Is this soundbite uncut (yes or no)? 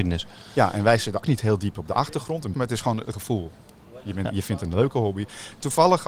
no